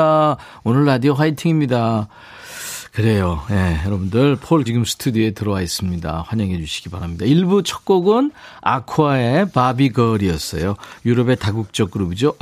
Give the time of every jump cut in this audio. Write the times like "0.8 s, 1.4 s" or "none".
4.7 s